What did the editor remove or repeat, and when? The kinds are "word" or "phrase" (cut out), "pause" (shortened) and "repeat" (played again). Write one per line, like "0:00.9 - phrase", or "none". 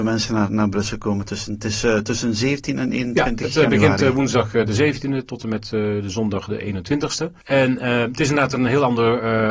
0:07.4 - pause

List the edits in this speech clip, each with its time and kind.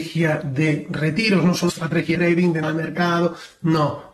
0:01.7 - word
0:02.1 - word
0:02.6 - word

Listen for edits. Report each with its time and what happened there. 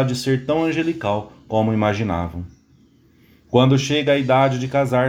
none

